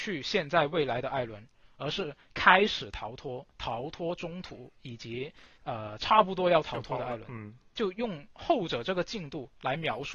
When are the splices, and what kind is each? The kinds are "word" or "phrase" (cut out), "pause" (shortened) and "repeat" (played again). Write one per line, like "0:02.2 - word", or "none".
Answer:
0:05.5 - pause